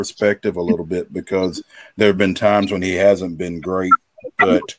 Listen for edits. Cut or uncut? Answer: uncut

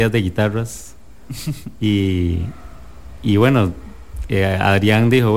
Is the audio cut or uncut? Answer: uncut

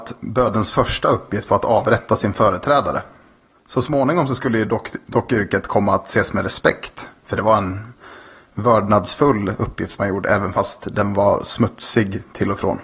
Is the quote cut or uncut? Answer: uncut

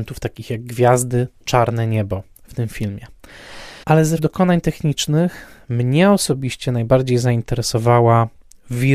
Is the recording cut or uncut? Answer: cut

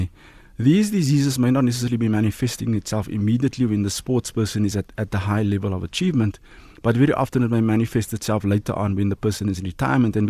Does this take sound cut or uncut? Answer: uncut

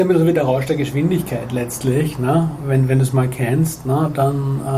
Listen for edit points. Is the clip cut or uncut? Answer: uncut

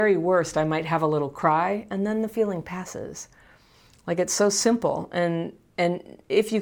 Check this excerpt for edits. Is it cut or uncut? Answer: uncut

